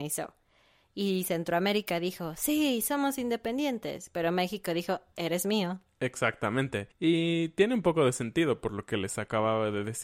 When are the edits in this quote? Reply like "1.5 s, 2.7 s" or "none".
5.1 s, 6.9 s